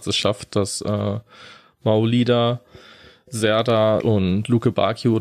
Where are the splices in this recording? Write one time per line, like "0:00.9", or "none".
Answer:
0:04.0